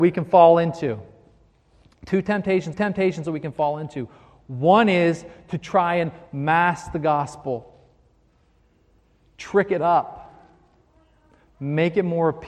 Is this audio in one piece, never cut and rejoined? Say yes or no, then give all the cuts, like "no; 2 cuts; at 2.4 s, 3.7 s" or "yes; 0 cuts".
no; 1 cut; at 2.7 s